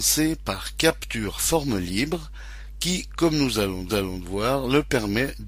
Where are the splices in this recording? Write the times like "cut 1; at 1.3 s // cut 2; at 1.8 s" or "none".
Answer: cut 1; at 3.9 s